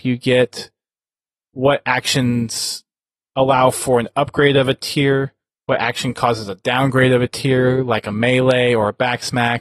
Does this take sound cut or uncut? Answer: uncut